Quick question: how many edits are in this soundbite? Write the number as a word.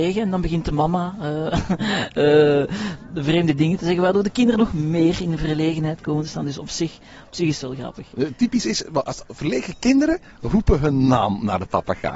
zero